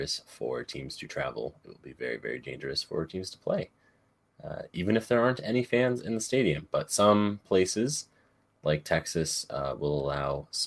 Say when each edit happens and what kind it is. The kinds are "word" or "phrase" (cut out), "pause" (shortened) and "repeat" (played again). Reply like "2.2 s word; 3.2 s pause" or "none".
none